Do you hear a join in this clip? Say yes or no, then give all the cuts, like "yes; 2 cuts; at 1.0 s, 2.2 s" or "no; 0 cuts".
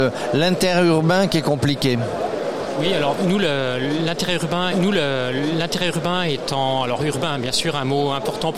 yes; 1 cut; at 4.7 s